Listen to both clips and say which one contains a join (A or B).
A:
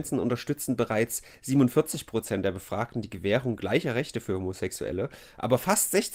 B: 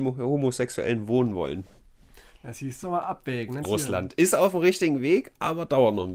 B